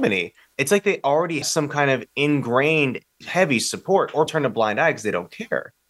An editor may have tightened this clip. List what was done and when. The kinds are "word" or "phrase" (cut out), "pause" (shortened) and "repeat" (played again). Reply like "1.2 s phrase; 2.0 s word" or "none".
1.4 s word; 3.2 s word; 4.3 s word